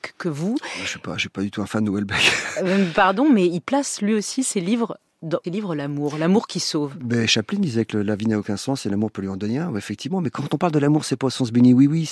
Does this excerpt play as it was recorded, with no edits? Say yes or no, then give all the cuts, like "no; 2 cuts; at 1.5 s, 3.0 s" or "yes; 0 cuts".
no; 1 cut; at 5.4 s